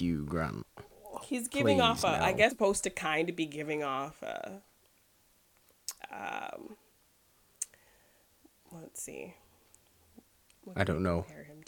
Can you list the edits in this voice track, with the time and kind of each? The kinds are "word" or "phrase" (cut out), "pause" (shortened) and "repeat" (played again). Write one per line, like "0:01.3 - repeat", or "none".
0:02.5 - word